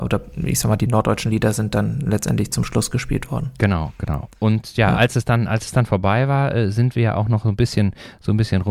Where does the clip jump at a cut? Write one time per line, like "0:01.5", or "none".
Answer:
none

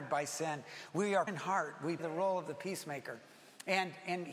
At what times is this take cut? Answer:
0:01.3
0:02.0

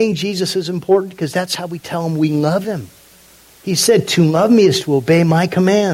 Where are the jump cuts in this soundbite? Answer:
none

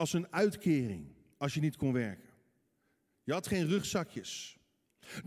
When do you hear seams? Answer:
none

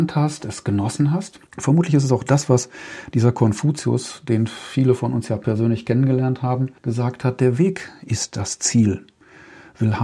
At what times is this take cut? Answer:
0:01.5
0:06.8

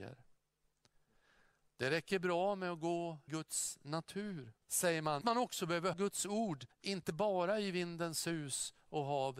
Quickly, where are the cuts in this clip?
0:03.3
0:04.6
0:05.2
0:05.9
0:06.7

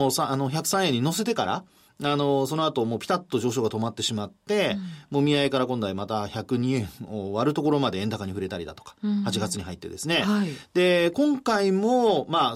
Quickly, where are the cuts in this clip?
none

